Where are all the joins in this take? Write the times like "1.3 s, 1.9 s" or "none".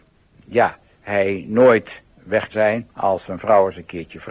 2.5 s, 2.9 s

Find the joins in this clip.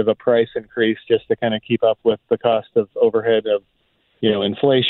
none

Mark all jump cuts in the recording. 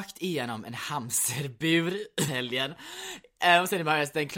2.3 s

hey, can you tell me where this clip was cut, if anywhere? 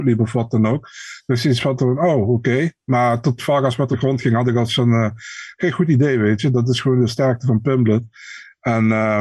3.9 s, 4.7 s

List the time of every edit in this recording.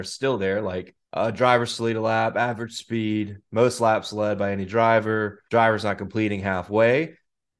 1.0 s, 5.5 s

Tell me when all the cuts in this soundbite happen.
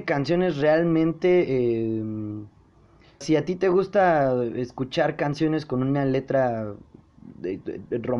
3.2 s

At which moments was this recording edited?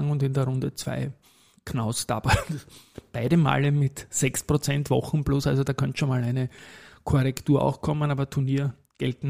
none

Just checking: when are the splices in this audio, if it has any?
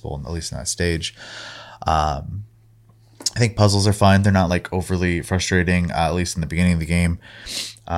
none

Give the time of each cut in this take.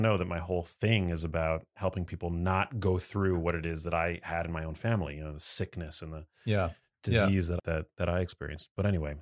7.6 s

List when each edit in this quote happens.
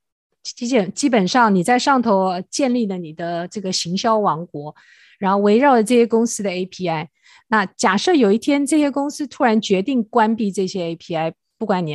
none

